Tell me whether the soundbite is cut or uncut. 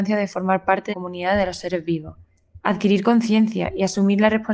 cut